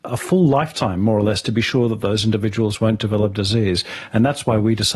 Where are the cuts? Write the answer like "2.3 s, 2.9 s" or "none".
none

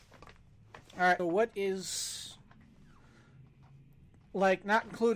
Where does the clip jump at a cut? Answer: 1.2 s, 4.2 s

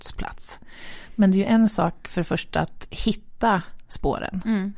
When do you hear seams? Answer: none

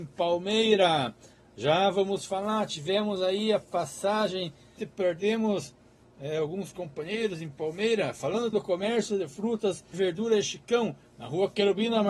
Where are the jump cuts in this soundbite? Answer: 4.8 s, 8.5 s, 9.9 s

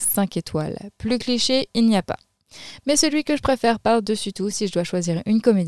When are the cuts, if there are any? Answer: none

